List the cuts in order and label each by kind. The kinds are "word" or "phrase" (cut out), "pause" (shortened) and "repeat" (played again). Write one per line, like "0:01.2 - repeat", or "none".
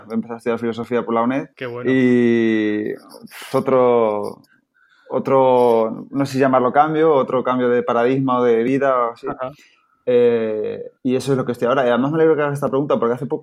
0:01.5 - pause
0:03.5 - word
0:11.0 - pause